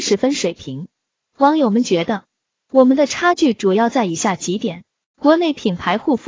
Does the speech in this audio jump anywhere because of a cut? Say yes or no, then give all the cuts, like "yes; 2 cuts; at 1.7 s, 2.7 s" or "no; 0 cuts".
no; 0 cuts